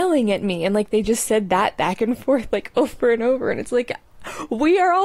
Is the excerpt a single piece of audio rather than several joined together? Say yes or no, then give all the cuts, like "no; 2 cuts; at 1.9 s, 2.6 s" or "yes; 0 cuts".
yes; 0 cuts